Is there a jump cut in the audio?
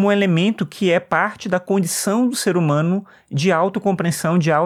no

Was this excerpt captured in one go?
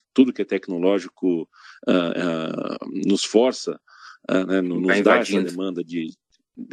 yes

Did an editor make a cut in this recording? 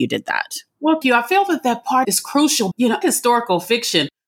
yes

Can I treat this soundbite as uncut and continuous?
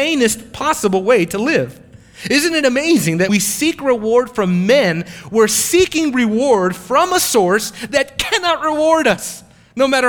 no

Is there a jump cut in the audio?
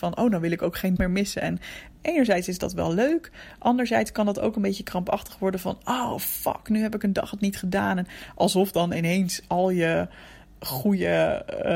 yes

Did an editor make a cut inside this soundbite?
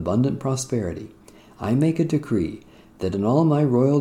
no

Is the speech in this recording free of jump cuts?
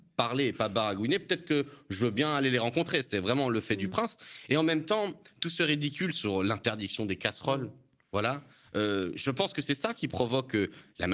yes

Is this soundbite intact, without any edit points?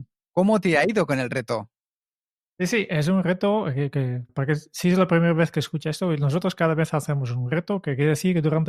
no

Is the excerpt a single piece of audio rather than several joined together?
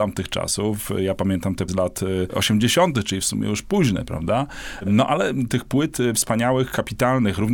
no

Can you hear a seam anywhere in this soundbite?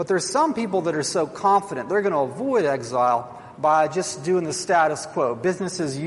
no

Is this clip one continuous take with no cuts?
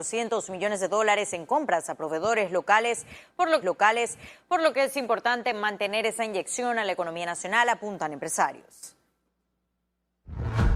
no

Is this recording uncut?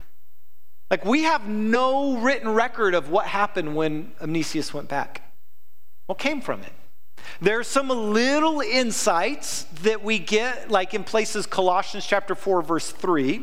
yes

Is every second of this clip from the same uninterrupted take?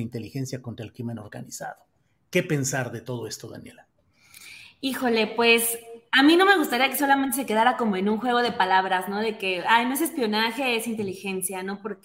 yes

